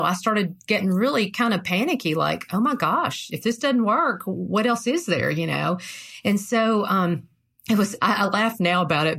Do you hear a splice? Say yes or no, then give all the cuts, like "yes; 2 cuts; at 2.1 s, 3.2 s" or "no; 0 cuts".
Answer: no; 0 cuts